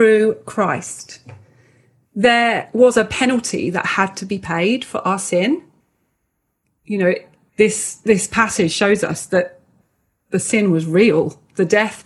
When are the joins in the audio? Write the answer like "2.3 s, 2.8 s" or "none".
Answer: none